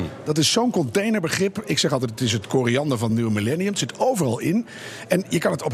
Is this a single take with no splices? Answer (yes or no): yes